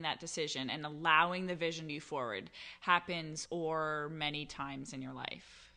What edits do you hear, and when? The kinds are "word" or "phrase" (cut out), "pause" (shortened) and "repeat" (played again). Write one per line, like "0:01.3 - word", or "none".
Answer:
0:01.9 - phrase
0:03.5 - word